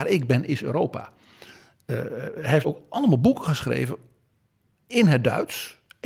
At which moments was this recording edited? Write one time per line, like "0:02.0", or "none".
0:02.6